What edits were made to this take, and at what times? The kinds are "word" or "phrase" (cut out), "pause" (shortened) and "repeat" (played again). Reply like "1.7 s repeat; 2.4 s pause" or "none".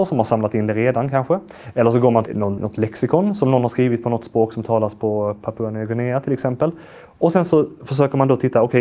2.3 s word; 2.6 s word